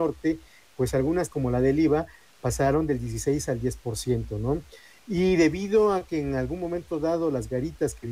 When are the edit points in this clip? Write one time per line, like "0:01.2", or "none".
0:01.3